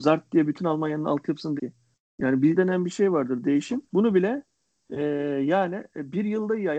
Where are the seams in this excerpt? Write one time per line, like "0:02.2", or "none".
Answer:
0:01.6
0:02.6
0:03.9